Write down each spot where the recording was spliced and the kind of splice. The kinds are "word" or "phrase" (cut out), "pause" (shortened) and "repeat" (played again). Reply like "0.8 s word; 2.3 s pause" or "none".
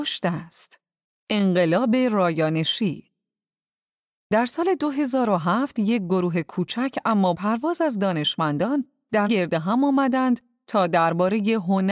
1.0 s pause; 7.3 s word; 9.3 s word